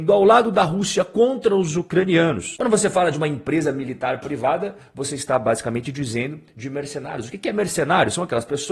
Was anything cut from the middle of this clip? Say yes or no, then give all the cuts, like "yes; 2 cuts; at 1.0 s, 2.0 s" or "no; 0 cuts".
no; 0 cuts